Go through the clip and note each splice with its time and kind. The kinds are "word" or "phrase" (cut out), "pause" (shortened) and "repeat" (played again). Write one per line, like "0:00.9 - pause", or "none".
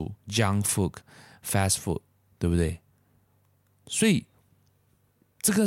none